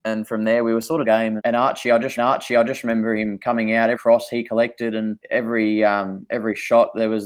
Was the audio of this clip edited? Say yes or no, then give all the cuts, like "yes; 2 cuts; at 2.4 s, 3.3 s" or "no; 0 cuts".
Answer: yes; 5 cuts; at 1.0 s, 1.4 s, 2.2 s, 3.9 s, 5.2 s